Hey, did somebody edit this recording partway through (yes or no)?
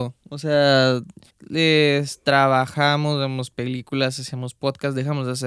yes